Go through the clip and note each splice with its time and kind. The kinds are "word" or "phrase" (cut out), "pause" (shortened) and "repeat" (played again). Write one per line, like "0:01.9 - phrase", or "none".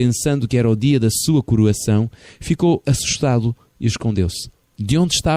none